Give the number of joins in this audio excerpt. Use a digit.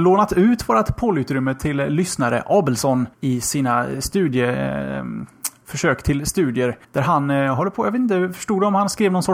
2